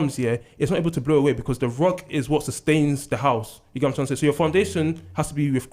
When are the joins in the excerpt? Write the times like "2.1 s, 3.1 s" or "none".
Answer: none